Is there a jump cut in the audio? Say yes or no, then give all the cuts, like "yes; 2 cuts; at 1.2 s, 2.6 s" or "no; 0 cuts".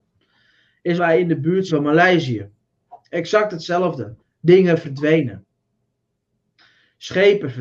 yes; 3 cuts; at 1.0 s, 1.7 s, 4.2 s